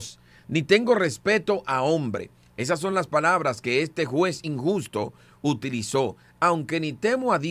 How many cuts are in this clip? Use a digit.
0